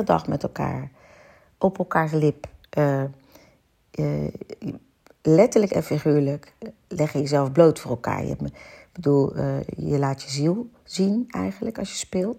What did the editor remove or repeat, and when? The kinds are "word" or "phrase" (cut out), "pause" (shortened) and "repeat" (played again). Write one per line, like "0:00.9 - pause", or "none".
none